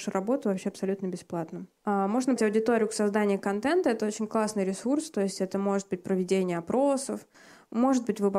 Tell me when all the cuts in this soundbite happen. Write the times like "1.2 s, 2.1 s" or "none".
1.8 s, 2.4 s